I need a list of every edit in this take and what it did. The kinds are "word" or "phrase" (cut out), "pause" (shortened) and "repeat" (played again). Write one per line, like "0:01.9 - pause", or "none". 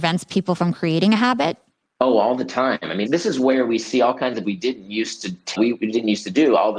0:03.1 - word
0:04.4 - word
0:05.5 - word

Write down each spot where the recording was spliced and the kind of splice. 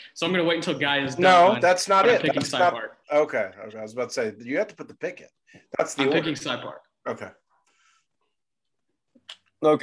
0:03.0 - pause

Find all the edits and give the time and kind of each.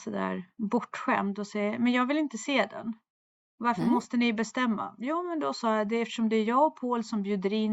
0:03.3 - pause

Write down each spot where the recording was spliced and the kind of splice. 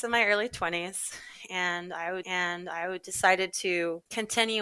0:02.2 - repeat

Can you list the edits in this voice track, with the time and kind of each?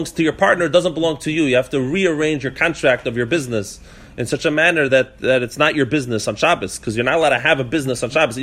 none

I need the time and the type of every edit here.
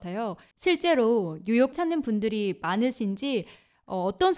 0:01.7 - word

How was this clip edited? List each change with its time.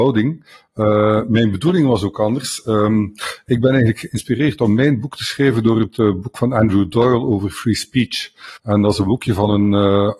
0:08.6 - pause

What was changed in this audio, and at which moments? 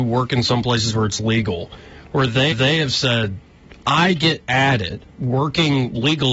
0:02.5 - repeat
0:05.1 - pause

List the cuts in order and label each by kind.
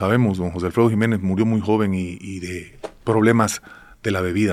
none

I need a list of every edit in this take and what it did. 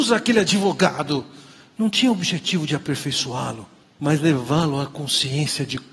0:03.8 - pause

